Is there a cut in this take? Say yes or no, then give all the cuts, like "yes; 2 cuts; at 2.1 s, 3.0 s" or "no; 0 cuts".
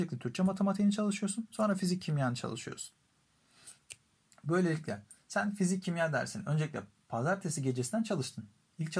no; 0 cuts